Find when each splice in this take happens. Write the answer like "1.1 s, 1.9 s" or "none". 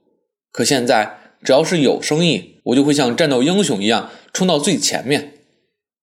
2.6 s